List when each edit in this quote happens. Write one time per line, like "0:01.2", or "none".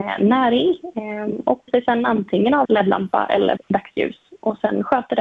0:01.7
0:02.6
0:03.6